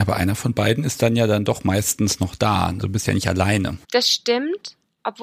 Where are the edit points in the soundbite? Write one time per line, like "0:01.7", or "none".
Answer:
0:02.8
0:03.8